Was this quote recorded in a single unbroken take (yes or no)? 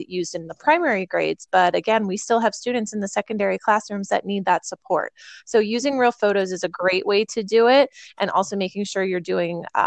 yes